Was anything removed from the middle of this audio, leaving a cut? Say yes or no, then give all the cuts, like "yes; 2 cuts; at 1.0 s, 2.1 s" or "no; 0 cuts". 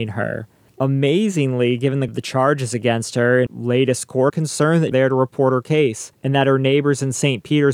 yes; 4 cuts; at 2.1 s, 3.5 s, 4.3 s, 4.9 s